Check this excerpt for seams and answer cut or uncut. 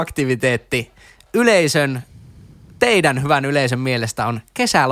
uncut